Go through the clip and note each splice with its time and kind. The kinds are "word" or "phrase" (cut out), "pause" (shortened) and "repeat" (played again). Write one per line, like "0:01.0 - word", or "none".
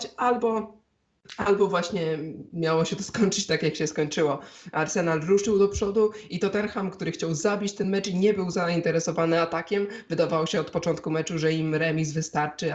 none